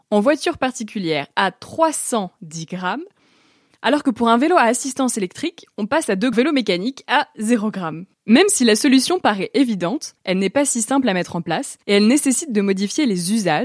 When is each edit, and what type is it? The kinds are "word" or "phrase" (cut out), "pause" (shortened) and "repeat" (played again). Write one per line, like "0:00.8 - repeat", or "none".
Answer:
0:06.3 - phrase
0:10.2 - pause
0:11.8 - pause